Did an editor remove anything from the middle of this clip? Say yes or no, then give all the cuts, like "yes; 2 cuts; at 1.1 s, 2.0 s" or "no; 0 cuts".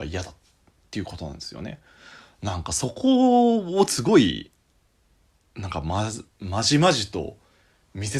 no; 0 cuts